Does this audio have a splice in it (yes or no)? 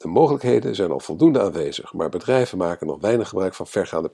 no